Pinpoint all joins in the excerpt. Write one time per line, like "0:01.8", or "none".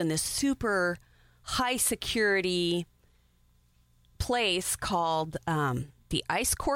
none